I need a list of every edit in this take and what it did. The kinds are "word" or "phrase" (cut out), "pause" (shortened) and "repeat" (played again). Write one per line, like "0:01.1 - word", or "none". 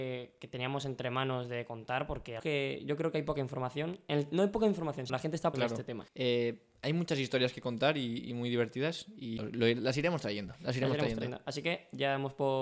0:02.4 - phrase
0:05.1 - word
0:05.5 - phrase
0:06.1 - pause
0:09.4 - word